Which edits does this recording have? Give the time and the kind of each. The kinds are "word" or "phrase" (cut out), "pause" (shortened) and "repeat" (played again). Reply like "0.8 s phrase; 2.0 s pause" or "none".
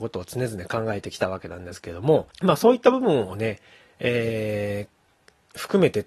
2.3 s pause